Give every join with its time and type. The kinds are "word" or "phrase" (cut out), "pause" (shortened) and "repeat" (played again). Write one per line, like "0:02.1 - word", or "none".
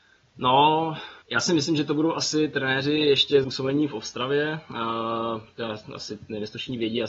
0:01.2 - pause
0:03.4 - phrase